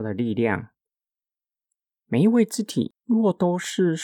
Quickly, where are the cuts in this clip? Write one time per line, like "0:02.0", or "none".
0:03.0